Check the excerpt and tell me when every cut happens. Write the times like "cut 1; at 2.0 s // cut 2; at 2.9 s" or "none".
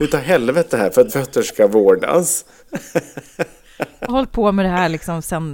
cut 1; at 1.1 s // cut 2; at 4.1 s